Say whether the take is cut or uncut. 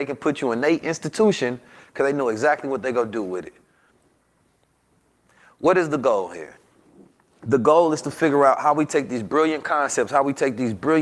uncut